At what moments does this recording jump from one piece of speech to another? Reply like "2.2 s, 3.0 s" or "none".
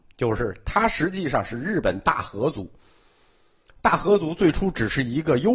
none